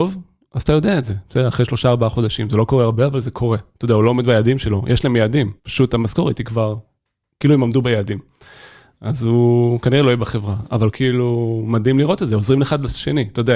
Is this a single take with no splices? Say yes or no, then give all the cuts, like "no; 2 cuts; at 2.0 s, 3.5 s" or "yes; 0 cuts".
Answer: no; 2 cuts; at 5.6 s, 10.9 s